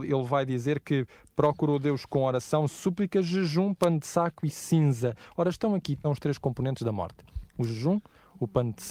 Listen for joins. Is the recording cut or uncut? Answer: cut